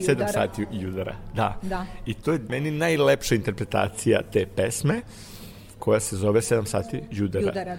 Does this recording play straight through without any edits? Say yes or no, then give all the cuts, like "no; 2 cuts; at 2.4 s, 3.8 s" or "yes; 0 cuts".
yes; 0 cuts